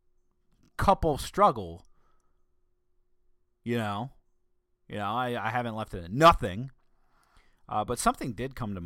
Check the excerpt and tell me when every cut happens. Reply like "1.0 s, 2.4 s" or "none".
none